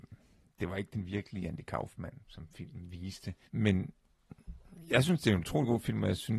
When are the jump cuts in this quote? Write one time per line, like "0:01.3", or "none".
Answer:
0:02.2